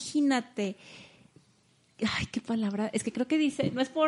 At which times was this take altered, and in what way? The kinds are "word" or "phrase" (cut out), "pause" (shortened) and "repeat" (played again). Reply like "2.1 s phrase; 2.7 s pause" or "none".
none